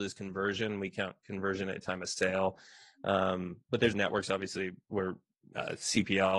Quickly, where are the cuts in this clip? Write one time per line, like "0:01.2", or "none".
0:03.9